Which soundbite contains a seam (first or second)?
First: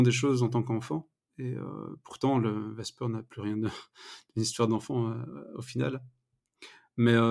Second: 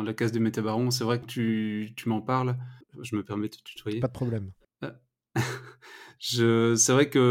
second